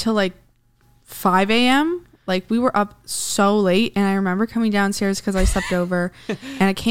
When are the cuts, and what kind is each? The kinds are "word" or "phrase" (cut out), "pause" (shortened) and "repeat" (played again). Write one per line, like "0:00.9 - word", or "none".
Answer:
none